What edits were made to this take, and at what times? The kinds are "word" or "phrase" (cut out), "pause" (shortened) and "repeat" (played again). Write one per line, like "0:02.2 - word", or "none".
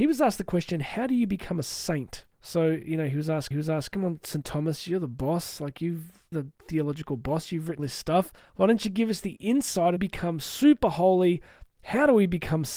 0:02.3 - pause
0:03.5 - repeat
0:06.3 - word
0:07.8 - word
0:08.4 - pause
0:10.0 - phrase